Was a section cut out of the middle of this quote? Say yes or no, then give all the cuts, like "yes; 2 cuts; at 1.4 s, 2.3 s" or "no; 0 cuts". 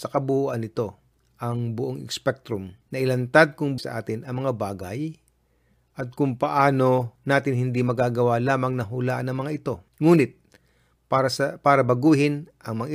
yes; 5 cuts; at 1.1 s, 2.8 s, 3.8 s, 7.2 s, 9.9 s